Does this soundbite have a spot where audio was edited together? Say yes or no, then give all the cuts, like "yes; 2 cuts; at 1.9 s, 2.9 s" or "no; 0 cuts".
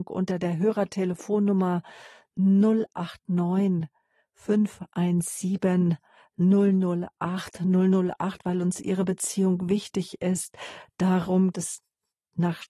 yes; 1 cut; at 11.5 s